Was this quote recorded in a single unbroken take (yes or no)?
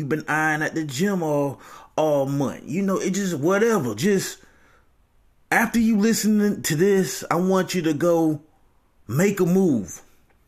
yes